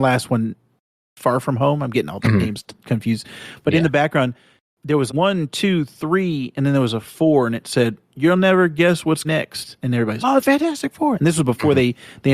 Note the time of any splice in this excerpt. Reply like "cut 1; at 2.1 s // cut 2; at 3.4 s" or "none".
cut 1; at 5.1 s // cut 2; at 9.2 s // cut 3; at 10.2 s